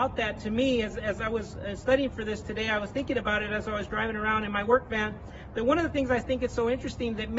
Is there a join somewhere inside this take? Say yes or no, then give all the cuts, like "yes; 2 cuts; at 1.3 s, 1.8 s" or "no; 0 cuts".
no; 0 cuts